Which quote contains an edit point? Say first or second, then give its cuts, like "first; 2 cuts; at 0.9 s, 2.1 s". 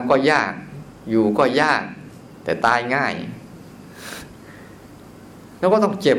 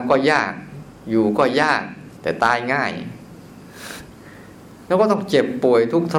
second; 2 cuts; at 2.2 s, 4.5 s